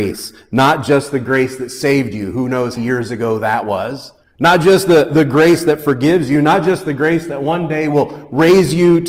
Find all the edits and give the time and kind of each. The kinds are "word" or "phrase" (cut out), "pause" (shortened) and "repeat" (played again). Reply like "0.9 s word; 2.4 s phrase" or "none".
2.8 s phrase; 4.2 s pause